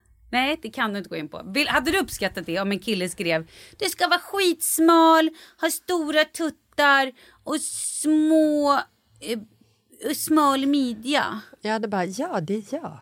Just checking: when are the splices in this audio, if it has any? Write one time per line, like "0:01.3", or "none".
none